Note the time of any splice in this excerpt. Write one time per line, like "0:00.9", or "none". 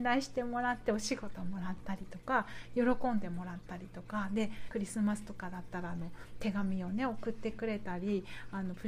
0:04.7

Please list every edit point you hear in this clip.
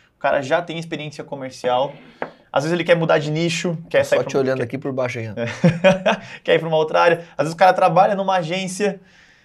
none

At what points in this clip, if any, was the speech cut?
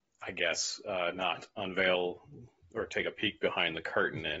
none

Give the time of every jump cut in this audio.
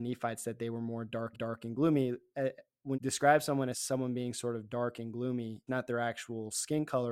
0:01.3
0:02.9
0:03.7
0:05.7

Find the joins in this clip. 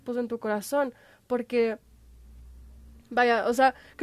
0:03.0

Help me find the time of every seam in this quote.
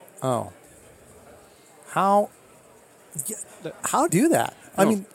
0:04.1

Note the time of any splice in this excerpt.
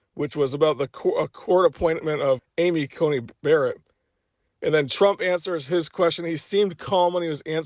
0:02.4

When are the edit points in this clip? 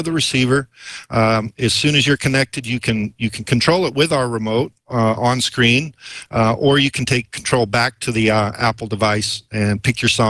none

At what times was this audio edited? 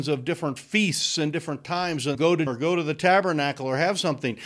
0:02.1
0:02.5

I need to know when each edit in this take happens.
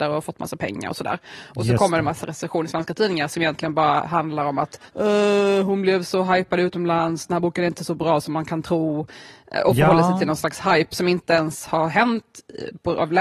0:04.9

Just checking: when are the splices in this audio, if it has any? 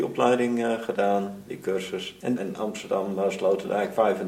0:02.4

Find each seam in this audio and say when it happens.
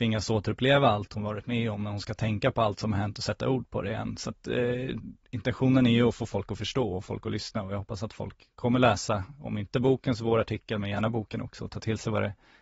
none

